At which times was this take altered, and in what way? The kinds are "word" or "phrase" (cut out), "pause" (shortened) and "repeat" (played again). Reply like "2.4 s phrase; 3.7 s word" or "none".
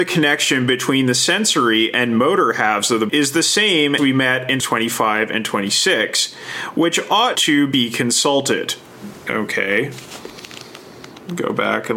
3.1 s word; 4.0 s word; 4.6 s word; 7.3 s word